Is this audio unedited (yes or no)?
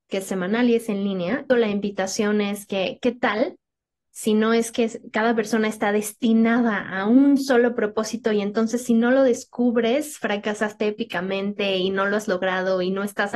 no